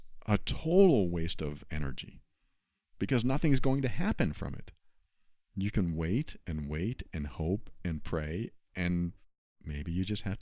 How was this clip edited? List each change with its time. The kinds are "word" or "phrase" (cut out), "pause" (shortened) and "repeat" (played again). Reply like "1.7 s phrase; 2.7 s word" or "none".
none